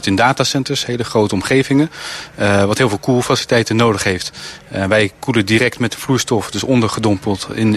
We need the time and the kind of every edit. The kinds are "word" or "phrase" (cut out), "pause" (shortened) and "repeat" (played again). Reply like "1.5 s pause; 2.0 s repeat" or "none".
none